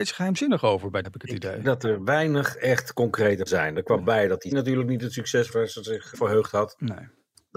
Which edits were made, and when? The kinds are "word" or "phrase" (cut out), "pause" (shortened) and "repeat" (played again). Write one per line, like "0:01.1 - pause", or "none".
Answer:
0:01.0 - word
0:01.6 - word
0:03.5 - word
0:04.0 - word
0:04.5 - word
0:05.5 - word
0:06.1 - word